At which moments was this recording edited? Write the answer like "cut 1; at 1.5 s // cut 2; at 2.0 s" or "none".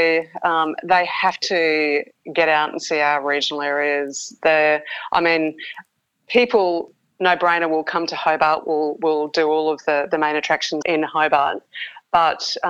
cut 1; at 10.8 s